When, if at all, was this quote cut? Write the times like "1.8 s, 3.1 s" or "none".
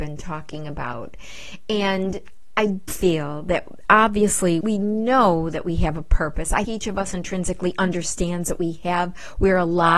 2.9 s, 4.6 s, 6.6 s